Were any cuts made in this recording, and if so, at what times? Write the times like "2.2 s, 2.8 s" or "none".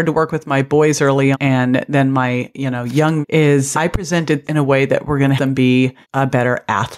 1.3 s, 3.2 s, 3.7 s, 4.4 s, 5.4 s, 6.0 s